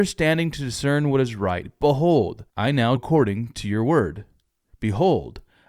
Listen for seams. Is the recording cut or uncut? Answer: cut